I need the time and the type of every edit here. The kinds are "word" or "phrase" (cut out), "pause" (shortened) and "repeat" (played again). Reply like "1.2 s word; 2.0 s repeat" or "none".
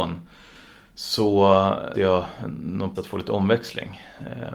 1.9 s word; 2.9 s word